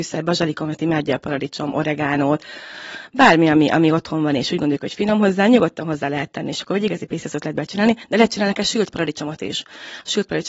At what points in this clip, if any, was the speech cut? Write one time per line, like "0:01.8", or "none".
none